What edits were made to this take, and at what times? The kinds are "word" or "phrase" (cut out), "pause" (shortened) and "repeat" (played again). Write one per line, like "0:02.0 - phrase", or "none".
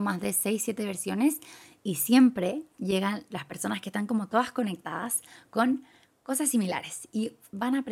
none